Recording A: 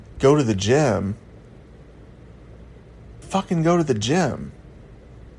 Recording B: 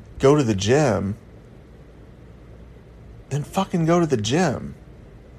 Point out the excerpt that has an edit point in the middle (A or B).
A